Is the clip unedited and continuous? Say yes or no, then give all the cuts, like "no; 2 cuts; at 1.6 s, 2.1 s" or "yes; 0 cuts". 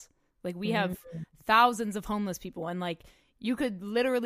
yes; 0 cuts